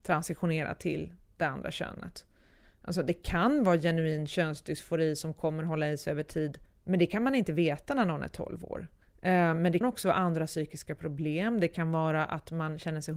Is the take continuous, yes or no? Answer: no